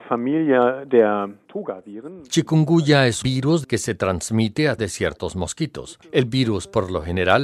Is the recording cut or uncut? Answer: cut